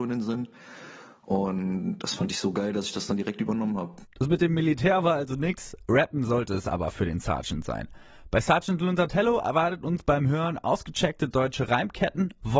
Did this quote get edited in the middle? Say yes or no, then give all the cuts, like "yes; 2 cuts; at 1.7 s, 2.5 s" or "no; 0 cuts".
yes; 1 cut; at 4.1 s